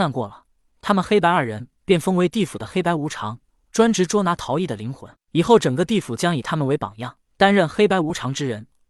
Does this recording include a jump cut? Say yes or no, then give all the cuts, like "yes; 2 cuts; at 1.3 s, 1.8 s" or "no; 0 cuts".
yes; 2 cuts; at 1.8 s, 7.2 s